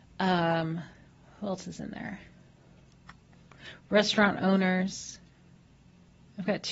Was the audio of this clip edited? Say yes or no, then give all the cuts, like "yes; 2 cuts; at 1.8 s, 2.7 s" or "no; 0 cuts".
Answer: no; 0 cuts